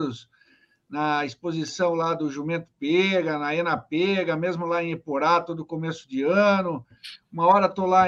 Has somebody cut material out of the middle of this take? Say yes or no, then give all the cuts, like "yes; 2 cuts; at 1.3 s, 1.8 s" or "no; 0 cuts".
no; 0 cuts